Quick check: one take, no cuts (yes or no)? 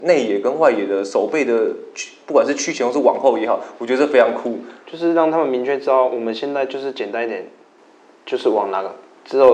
yes